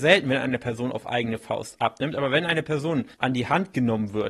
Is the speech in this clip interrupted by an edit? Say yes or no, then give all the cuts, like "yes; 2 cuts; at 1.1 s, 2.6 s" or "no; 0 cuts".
yes; 1 cut; at 3.1 s